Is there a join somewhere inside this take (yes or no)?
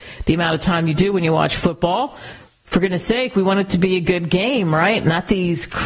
no